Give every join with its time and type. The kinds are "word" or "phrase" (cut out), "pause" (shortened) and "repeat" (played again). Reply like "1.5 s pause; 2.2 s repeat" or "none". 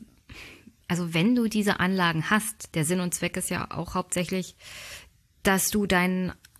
none